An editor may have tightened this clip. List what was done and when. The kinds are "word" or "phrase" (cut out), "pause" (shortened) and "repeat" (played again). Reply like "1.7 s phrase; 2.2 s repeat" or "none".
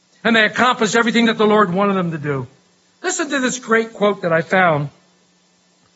none

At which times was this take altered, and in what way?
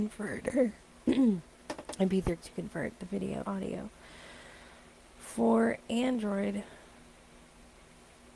2.4 s word; 3.4 s word

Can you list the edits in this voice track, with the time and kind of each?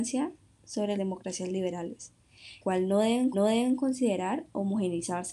0.9 s word; 2.6 s word; 3.3 s repeat

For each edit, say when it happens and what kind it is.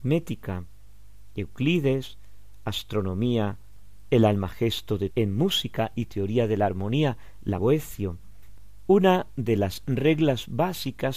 5.1 s word; 7.6 s phrase

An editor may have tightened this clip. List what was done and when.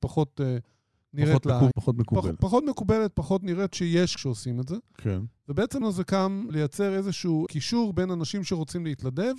1.7 s word; 3.7 s word; 4.2 s word; 5.8 s word; 6.5 s word; 7.5 s word

